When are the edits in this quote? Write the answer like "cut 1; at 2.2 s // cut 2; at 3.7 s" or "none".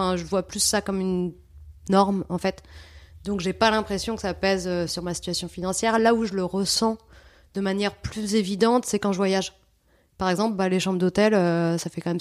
cut 1; at 4.9 s